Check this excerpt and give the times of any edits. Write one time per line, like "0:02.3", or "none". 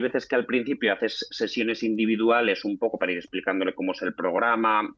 none